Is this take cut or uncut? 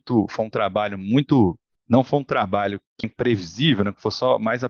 cut